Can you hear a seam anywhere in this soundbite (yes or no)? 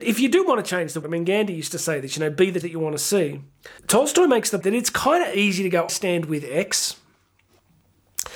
yes